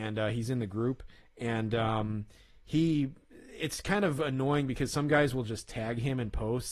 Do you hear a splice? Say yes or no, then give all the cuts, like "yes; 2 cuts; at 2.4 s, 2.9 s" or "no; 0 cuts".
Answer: no; 0 cuts